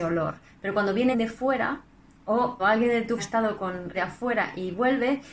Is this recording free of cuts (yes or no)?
no